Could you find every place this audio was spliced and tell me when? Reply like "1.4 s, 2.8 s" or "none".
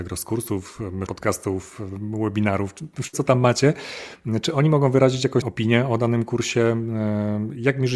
1.1 s, 3.1 s, 5.4 s